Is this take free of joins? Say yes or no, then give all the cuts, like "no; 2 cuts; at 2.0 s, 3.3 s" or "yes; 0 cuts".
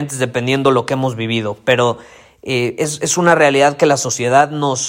yes; 0 cuts